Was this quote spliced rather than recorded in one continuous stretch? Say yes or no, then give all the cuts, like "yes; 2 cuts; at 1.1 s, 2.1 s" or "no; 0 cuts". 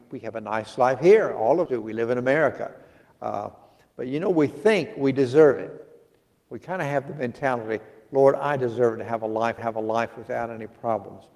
yes; 2 cuts; at 1.7 s, 9.6 s